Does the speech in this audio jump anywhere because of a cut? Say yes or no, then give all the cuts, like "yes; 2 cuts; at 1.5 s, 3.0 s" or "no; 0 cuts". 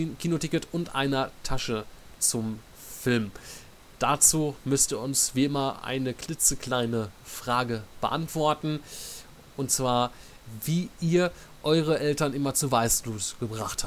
no; 0 cuts